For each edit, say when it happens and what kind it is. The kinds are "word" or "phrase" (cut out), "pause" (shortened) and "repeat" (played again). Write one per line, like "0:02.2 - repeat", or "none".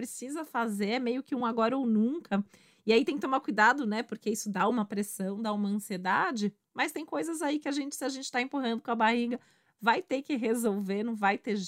none